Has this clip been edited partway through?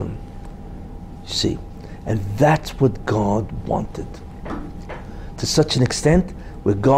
no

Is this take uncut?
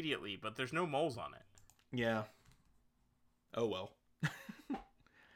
yes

